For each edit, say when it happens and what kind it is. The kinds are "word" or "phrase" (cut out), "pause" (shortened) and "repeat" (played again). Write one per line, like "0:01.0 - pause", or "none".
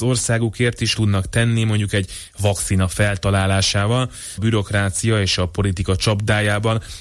0:01.0 - word
0:04.4 - phrase